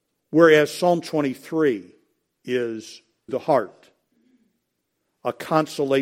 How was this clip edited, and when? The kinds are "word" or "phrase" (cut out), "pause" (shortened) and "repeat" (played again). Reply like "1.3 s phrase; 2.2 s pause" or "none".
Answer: 3.3 s word